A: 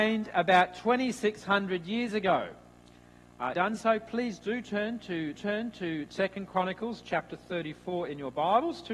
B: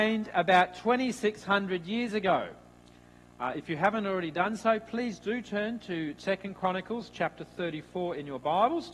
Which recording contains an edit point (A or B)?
A